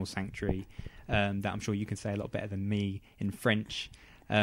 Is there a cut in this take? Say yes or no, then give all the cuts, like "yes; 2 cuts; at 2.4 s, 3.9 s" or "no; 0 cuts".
no; 0 cuts